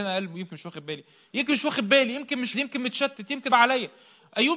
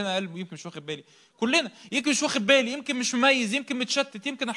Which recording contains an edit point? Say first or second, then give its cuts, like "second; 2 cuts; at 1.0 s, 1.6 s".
first; 3 cuts; at 1.3 s, 2.5 s, 3.5 s